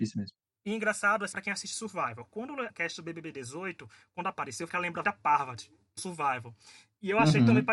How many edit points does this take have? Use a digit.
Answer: 6